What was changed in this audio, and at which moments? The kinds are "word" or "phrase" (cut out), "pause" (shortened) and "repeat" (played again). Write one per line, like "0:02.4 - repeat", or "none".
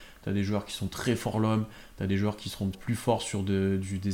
0:01.3 - word
0:02.7 - word